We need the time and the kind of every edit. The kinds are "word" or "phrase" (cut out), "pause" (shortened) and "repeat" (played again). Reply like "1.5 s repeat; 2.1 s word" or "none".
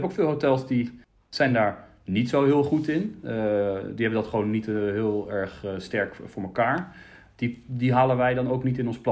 none